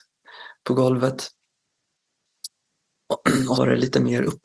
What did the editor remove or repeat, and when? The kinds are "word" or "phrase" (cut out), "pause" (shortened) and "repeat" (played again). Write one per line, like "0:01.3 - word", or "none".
0:03.5 - word